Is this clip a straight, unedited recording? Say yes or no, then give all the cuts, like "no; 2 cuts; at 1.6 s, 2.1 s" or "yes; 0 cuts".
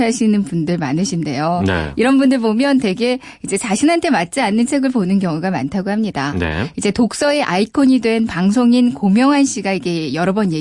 yes; 0 cuts